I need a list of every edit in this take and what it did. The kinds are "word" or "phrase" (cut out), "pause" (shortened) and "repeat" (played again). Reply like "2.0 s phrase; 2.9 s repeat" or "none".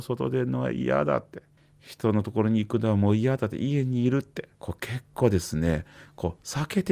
1.6 s pause; 4.5 s pause

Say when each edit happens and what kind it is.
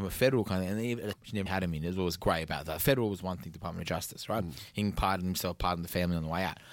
1.1 s phrase; 1.5 s word

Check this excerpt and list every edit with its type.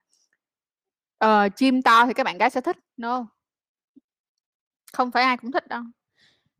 none

